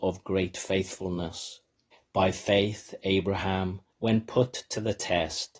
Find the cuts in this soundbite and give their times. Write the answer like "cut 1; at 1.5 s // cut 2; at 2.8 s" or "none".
cut 1; at 1.9 s // cut 2; at 3.9 s

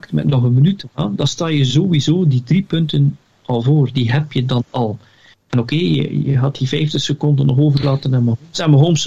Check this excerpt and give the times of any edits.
none

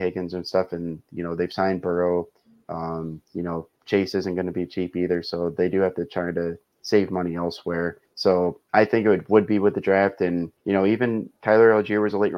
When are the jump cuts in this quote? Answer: cut 1; at 3.2 s // cut 2; at 3.8 s // cut 3; at 8.1 s // cut 4; at 10.6 s

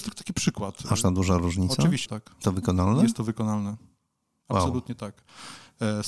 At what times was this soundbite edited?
cut 1; at 1.0 s // cut 2; at 2.1 s // cut 3; at 2.4 s

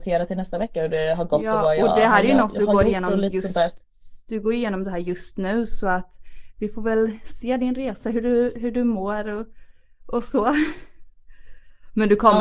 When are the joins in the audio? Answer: none

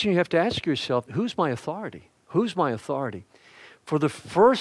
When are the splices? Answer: cut 1; at 1.1 s // cut 2; at 2.2 s

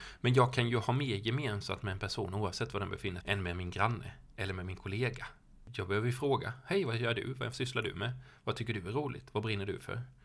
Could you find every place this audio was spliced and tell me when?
cut 1; at 3.2 s

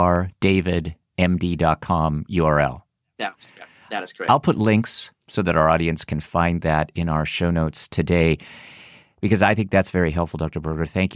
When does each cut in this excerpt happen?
cut 1; at 5.2 s

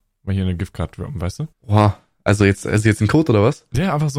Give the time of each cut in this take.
cut 1; at 1.5 s

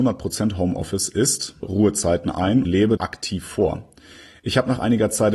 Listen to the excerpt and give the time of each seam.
cut 1; at 1.6 s // cut 2; at 2.6 s // cut 3; at 3.0 s

